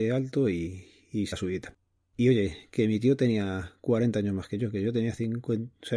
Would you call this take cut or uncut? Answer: cut